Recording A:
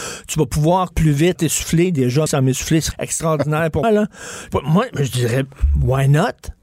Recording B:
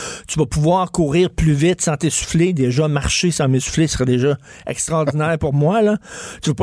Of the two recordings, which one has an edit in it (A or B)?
A